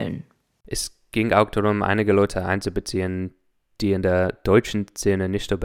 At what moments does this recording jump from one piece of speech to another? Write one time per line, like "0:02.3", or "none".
none